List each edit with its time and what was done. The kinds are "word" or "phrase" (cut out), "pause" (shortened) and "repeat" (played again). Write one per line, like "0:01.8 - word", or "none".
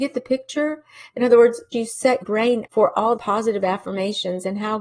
0:01.7 - word
0:02.2 - word
0:02.7 - word
0:03.2 - word